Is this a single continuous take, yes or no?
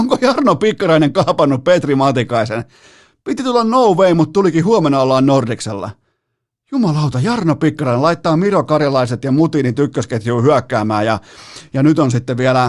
yes